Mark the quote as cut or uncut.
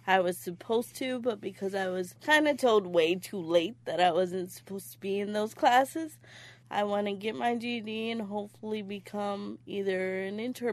uncut